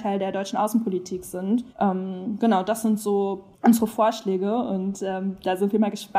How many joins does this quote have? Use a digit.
2